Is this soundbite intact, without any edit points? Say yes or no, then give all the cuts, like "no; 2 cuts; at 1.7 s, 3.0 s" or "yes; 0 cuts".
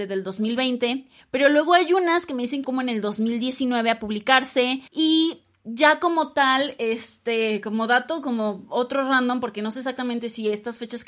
no; 3 cuts; at 1.2 s, 2.6 s, 4.9 s